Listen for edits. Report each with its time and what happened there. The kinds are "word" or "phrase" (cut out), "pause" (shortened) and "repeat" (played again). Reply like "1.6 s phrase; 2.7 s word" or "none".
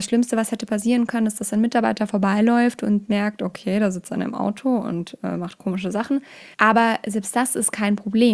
6.5 s pause